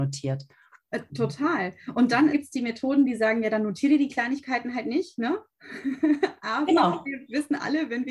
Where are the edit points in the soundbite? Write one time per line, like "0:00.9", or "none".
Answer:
0:02.3